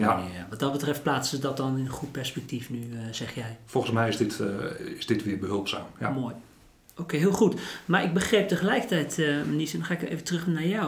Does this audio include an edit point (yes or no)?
no